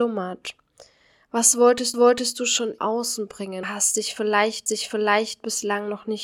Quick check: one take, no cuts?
no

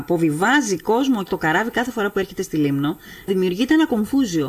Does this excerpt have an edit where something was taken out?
yes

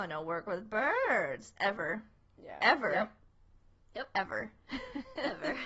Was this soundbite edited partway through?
no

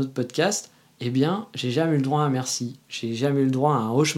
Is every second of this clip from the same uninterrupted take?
yes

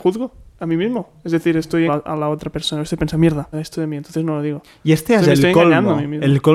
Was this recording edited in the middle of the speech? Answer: yes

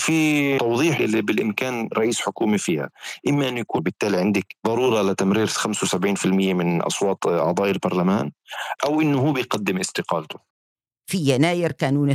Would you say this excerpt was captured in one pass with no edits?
no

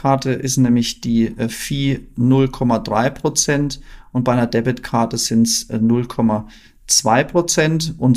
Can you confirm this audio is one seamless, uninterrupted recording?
yes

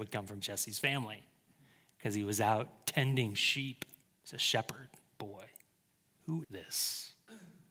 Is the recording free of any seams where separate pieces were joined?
no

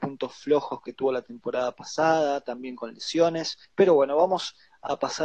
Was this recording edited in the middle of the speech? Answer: yes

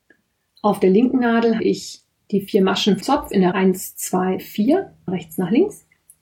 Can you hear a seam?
yes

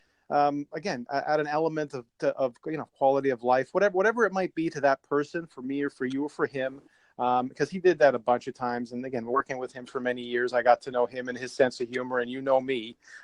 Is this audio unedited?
yes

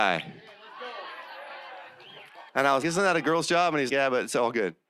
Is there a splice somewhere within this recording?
yes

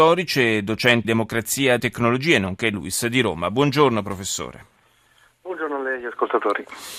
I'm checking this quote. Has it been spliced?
yes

